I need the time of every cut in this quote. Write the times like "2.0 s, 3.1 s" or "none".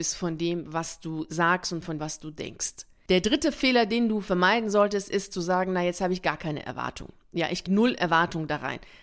2.0 s, 7.7 s